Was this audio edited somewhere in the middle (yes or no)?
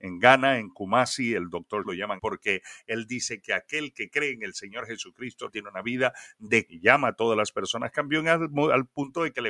yes